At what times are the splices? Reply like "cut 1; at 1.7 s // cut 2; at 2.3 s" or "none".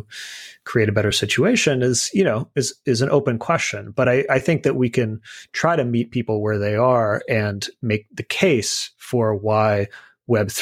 none